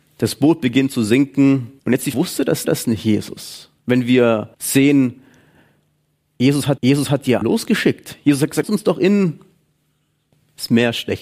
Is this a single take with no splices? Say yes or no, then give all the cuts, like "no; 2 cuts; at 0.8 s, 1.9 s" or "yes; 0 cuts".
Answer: no; 8 cuts; at 1.8 s, 2.1 s, 2.6 s, 3.8 s, 4.5 s, 6.8 s, 7.4 s, 8.6 s